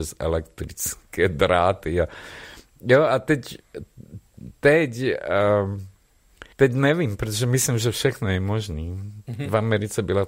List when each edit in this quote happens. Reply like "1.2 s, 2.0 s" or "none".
4.5 s, 6.5 s